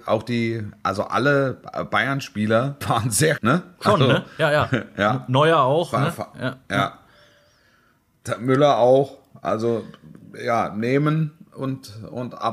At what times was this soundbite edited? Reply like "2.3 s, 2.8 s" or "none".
2.8 s, 3.4 s